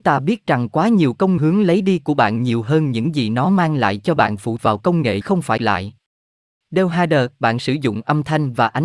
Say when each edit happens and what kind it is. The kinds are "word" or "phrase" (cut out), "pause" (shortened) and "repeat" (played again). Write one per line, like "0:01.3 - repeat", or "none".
0:01.4 - phrase
0:04.2 - phrase
0:04.6 - word
0:05.2 - word
0:05.6 - word

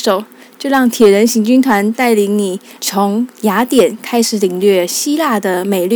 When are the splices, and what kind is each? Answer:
0:02.8 - pause

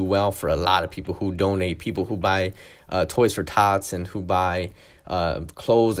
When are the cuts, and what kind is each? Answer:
none

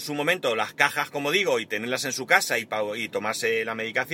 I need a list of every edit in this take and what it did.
none

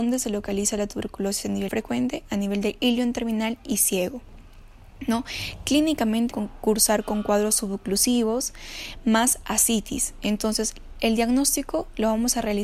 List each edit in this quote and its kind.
0:01.7 - phrase
0:06.3 - word

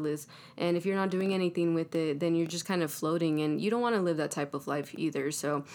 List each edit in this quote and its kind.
none

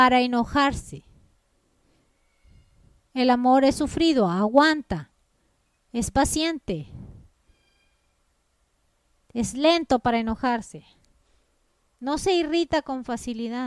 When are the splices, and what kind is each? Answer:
none

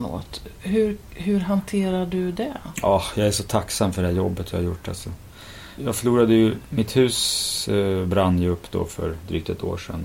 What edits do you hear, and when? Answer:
0:05.8 - word

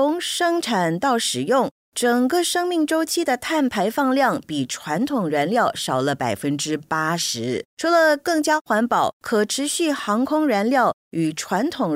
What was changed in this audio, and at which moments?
0:07.7 - pause

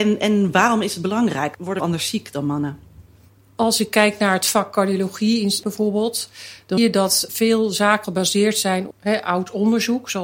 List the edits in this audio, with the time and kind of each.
0:01.8 - word
0:05.6 - word
0:06.8 - word
0:07.3 - word
0:08.0 - word
0:08.9 - word

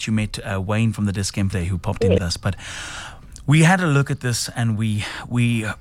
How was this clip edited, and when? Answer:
0:01.5 - phrase
0:02.2 - phrase

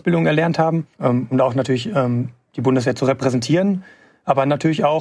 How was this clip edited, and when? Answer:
0:00.9 - pause

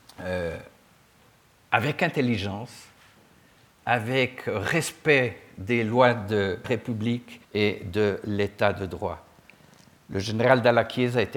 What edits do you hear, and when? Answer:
0:06.6 - word
0:07.4 - pause

